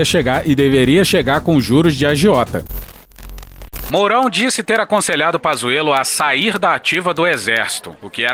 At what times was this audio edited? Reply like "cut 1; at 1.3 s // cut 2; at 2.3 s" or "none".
none